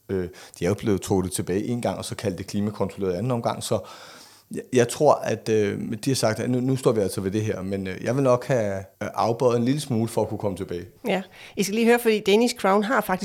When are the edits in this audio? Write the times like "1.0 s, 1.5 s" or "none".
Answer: 8.9 s, 11.0 s